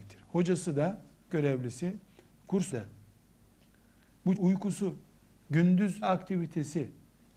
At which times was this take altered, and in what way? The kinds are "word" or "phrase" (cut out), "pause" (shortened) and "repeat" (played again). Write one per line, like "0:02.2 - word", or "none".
0:01.3 - word
0:02.7 - word
0:04.4 - word
0:06.0 - word